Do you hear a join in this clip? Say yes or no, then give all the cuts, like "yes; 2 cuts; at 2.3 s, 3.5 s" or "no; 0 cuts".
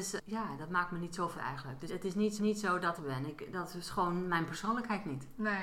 yes; 4 cuts; at 1.3 s, 1.9 s, 2.4 s, 3.0 s